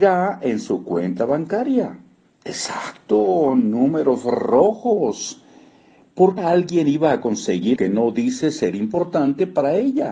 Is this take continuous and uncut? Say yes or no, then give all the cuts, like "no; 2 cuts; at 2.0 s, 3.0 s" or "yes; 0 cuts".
no; 3 cuts; at 2.3 s, 6.4 s, 7.8 s